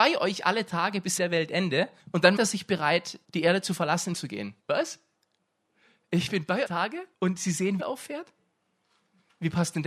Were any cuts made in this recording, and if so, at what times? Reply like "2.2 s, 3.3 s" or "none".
1.2 s, 2.0 s, 2.4 s, 3.2 s, 4.1 s, 4.6 s, 6.6 s, 7.1 s, 7.8 s